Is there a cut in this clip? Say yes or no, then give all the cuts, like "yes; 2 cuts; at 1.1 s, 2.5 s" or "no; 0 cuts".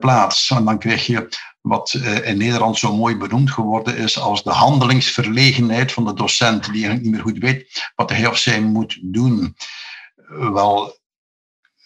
no; 0 cuts